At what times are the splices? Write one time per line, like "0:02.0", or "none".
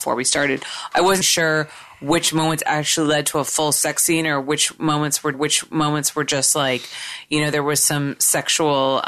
0:01.2
0:05.3